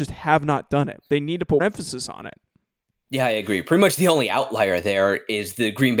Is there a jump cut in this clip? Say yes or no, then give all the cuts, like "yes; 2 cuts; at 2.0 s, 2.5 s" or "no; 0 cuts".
yes; 1 cut; at 1.6 s